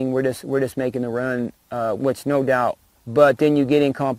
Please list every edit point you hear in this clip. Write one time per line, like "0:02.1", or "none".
0:02.0
0:02.9